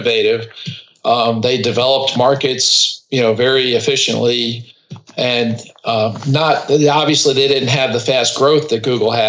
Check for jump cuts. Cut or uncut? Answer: uncut